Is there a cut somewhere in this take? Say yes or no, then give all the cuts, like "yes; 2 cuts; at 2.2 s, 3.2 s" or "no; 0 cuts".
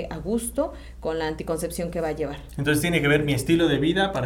no; 0 cuts